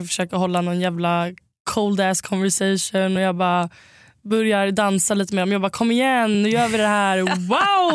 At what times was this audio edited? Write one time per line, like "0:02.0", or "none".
none